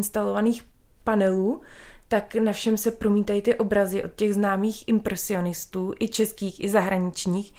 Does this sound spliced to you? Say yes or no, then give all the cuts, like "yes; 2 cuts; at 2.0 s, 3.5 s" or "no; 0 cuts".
no; 0 cuts